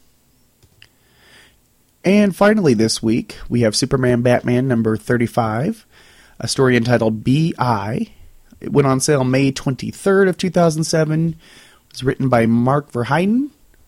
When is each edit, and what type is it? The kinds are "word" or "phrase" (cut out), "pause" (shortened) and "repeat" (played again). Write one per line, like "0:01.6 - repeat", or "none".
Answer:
none